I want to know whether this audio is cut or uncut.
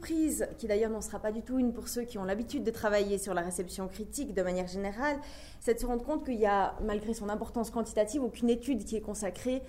uncut